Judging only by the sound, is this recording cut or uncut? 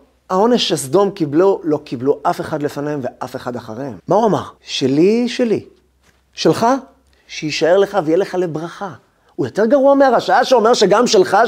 cut